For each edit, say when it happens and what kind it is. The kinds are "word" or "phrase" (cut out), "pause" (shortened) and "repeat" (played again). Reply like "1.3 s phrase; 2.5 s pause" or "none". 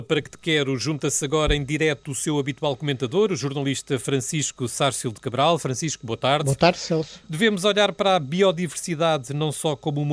none

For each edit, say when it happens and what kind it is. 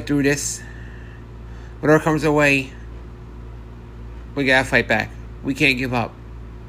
none

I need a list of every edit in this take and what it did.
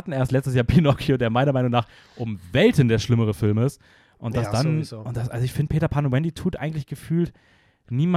none

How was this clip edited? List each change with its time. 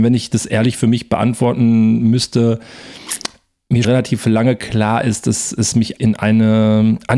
3.8 s word; 6.0 s word

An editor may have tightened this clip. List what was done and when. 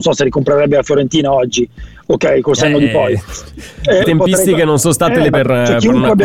4.0 s phrase; 5.3 s phrase

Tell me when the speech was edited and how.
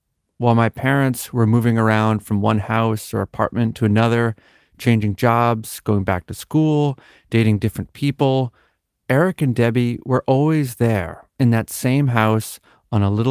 none

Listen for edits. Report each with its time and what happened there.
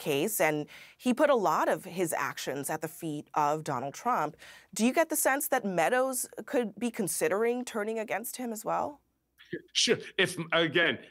9.7 s pause

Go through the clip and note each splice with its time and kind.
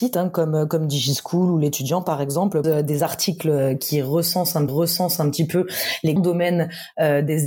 2.6 s word; 4.7 s repeat; 6.2 s word

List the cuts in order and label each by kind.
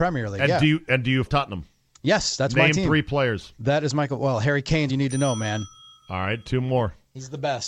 1.3 s word; 4.9 s word

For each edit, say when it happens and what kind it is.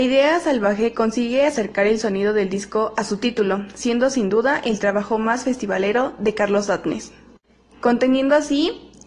none

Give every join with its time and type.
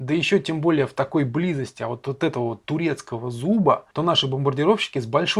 3.9 s pause

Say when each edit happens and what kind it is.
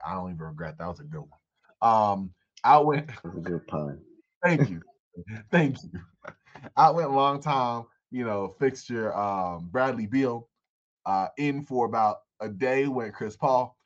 none

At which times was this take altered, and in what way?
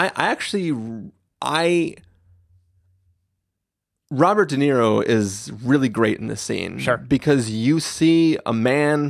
none

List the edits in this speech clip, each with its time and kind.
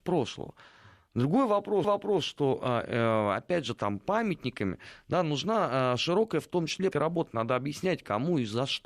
1.8 s repeat; 6.9 s word

